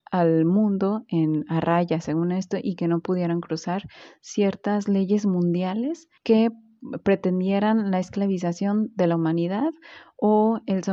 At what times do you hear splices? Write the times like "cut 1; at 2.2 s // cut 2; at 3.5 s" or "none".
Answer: cut 1; at 6.2 s